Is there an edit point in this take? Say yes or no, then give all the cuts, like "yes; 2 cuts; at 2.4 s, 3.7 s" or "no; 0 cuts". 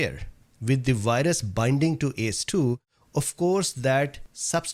no; 0 cuts